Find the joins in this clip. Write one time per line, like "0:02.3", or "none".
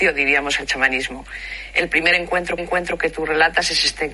0:02.6

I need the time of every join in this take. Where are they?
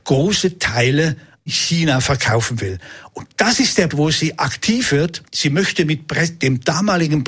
0:01.5
0:03.9
0:05.3

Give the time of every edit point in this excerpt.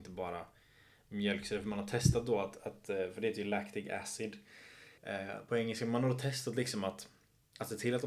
0:05.0

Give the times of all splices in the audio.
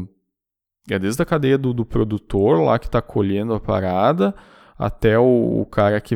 none

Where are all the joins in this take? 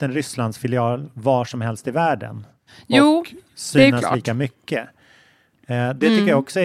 none

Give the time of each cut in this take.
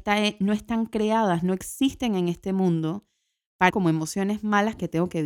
0:03.7

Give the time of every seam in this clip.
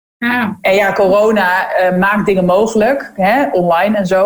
none

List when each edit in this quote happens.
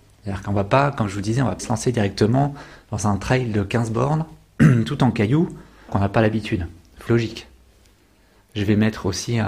0:01.6
0:05.9
0:07.1

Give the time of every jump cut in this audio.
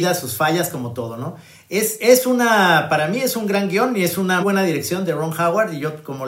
0:04.4

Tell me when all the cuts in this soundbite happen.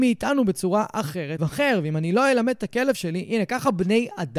0:01.4

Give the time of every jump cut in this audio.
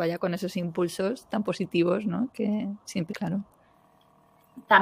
0:03.1

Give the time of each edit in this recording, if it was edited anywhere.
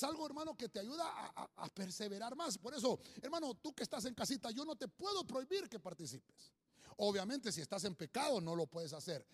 none

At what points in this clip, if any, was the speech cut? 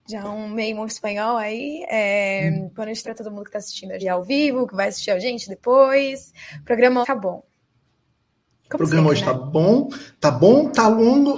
0:03.0
0:04.0
0:07.0

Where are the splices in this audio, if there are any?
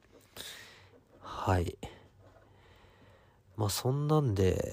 none

